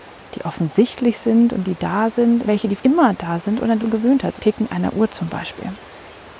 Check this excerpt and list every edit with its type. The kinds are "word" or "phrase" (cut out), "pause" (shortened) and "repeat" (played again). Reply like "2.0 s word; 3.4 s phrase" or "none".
2.5 s phrase; 2.8 s word; 3.8 s phrase; 4.4 s phrase